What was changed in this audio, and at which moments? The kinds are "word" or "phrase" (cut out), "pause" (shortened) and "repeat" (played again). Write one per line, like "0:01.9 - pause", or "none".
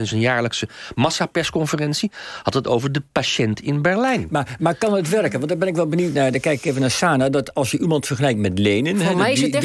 none

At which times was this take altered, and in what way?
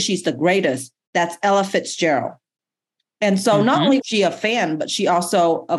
0:04.0 - word

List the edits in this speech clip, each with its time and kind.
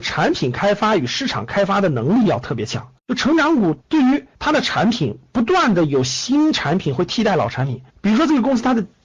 0:03.0 - pause
0:03.8 - pause
0:04.3 - pause
0:07.9 - pause

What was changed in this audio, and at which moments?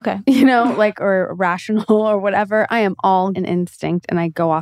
0:03.3 - word

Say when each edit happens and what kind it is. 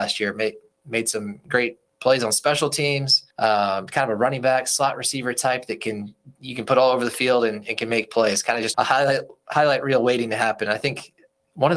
0:03.3 - pause
0:08.7 - word

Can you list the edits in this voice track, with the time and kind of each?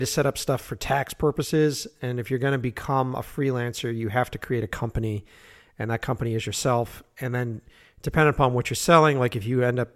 none

